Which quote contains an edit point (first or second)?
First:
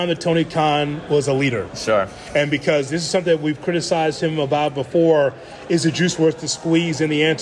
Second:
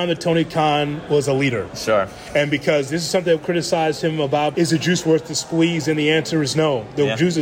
second